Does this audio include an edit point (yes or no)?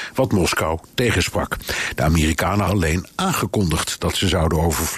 yes